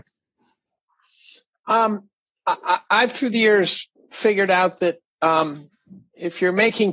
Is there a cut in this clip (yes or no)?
yes